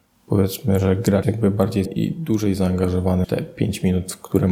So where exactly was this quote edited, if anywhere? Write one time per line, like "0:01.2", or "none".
0:01.2
0:01.8
0:03.2